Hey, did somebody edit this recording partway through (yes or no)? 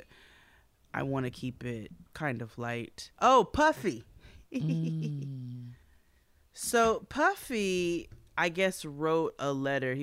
yes